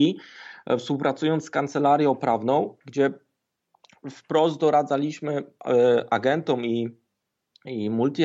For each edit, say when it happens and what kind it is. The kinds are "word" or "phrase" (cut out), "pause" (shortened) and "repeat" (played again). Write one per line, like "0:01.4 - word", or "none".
none

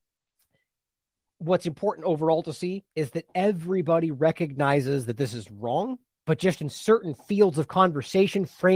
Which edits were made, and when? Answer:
0:06.1 - pause

